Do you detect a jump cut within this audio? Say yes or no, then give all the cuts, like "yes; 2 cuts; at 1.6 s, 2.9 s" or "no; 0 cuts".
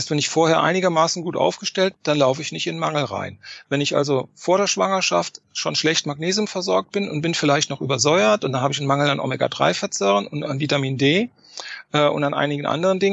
yes; 1 cut; at 2.0 s